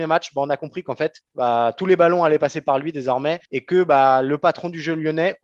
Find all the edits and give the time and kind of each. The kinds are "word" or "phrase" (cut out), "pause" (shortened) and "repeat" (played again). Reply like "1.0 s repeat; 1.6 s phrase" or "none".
1.2 s pause; 3.5 s pause